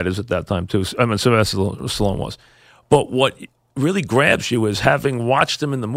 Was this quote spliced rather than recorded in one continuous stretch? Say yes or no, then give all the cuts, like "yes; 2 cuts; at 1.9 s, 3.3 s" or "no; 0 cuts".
no; 0 cuts